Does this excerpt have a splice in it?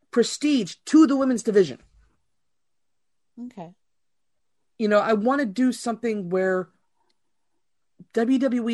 no; 0 cuts

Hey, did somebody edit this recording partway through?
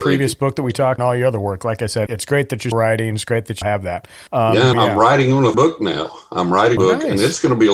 yes; 8 cuts; at 1.0 s, 2.1 s, 2.7 s, 3.6 s, 4.3 s, 4.7 s, 5.5 s, 6.8 s

